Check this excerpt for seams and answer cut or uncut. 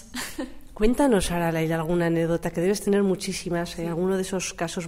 uncut